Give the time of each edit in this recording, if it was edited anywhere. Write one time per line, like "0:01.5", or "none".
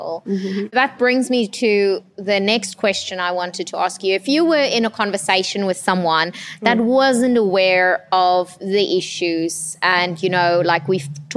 none